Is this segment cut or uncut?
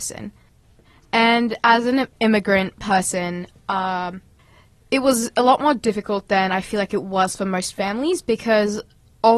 uncut